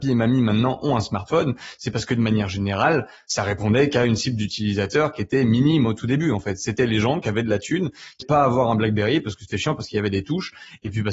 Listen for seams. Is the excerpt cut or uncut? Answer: cut